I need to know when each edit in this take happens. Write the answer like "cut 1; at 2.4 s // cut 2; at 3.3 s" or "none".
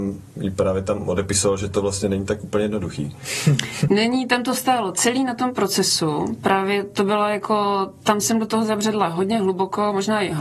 cut 1; at 3.9 s

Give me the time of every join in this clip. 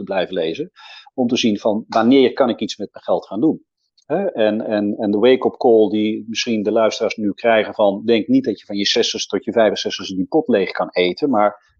none

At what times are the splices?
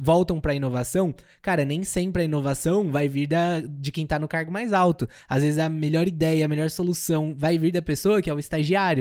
none

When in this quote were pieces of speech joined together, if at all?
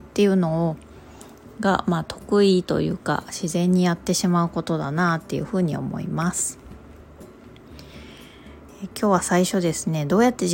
cut 1; at 8.7 s

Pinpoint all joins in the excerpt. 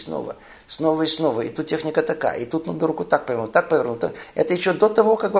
none

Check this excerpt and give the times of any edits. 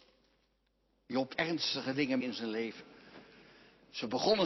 cut 1; at 1.3 s // cut 2; at 2.2 s

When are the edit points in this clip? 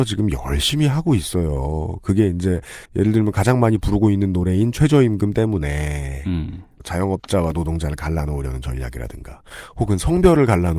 cut 1; at 2.9 s

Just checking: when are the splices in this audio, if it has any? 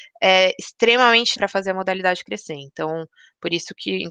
cut 1; at 1.4 s

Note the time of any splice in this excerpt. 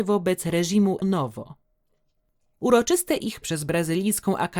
cut 1; at 1.0 s // cut 2; at 3.4 s

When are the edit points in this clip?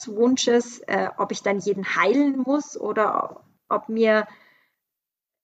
none

